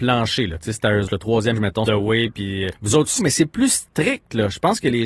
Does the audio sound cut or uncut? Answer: cut